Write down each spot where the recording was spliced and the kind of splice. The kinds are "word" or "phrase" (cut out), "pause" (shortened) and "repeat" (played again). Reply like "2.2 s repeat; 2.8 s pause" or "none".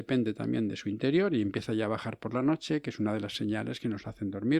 none